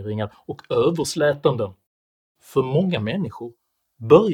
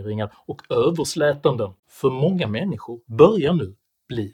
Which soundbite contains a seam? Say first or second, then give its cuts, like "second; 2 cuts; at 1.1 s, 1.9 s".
second; 2 cuts; at 1.8 s, 3.1 s